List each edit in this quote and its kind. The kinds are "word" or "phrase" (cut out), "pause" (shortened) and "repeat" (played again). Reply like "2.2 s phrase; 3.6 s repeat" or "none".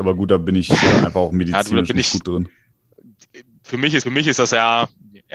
2.2 s word; 4.0 s repeat